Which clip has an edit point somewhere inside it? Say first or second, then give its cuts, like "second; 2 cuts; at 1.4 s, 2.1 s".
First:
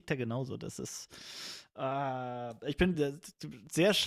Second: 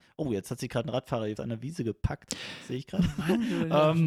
second; 1 cut; at 1.4 s